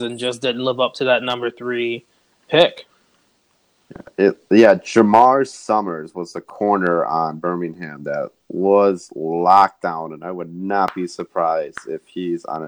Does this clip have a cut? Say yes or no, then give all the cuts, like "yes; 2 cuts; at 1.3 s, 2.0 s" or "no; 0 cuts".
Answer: no; 0 cuts